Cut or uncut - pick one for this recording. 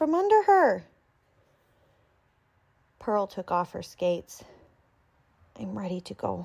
uncut